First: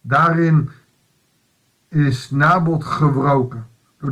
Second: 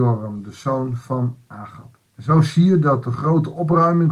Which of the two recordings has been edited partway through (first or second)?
second